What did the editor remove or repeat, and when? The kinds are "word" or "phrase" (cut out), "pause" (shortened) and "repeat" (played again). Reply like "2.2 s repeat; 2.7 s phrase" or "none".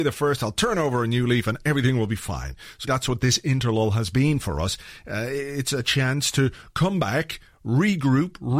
2.8 s word